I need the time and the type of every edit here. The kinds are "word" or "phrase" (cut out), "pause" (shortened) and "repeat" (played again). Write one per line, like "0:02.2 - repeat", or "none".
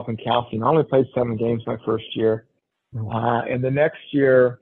none